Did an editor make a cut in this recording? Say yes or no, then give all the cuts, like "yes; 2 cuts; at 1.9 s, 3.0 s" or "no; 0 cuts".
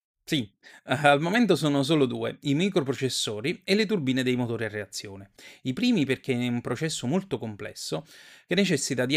no; 0 cuts